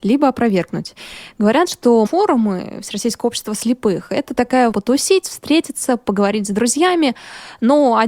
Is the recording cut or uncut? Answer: cut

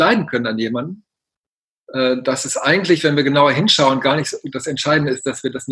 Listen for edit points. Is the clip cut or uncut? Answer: uncut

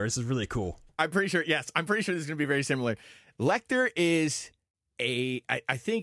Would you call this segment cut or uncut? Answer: uncut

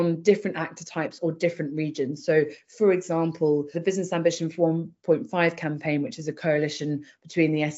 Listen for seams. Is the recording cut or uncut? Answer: cut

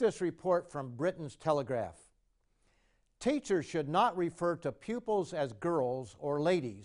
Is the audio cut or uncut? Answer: uncut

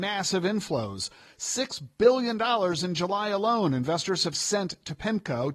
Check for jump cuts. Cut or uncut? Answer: uncut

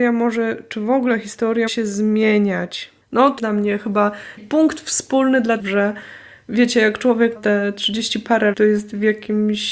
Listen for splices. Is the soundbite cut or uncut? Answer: cut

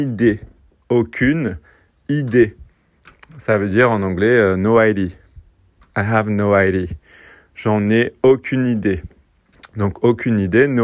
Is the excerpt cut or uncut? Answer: uncut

